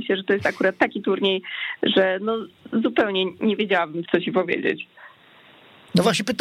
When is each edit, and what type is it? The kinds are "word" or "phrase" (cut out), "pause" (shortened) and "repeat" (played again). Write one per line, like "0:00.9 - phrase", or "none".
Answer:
0:04.0 - word